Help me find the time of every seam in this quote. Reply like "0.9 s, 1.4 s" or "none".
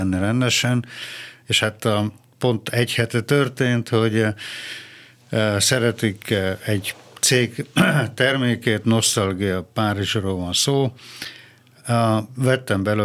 none